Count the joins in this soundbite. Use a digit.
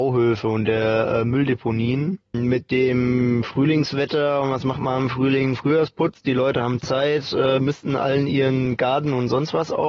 1